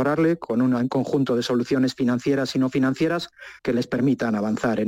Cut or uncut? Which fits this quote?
cut